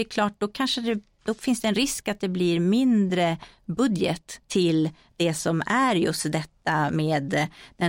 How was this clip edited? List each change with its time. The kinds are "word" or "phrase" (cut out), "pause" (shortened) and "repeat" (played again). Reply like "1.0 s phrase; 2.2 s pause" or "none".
4.4 s pause